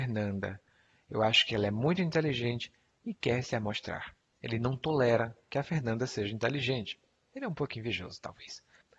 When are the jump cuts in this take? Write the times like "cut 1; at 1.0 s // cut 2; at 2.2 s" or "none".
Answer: none